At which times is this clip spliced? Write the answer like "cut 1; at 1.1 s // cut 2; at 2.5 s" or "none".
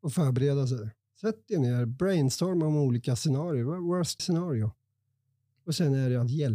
cut 1; at 4.2 s